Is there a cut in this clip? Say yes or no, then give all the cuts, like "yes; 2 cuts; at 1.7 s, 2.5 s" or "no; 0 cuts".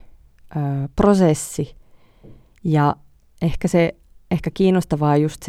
no; 0 cuts